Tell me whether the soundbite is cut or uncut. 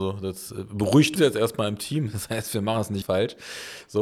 cut